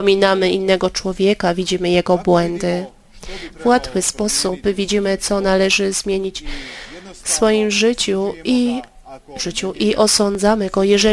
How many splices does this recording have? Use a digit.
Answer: 1